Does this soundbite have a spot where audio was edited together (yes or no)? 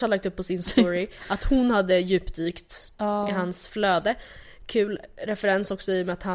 no